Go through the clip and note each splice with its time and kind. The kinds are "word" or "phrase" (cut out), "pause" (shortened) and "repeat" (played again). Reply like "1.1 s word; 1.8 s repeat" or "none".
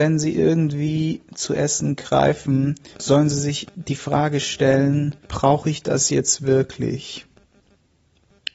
2.9 s pause; 5.2 s pause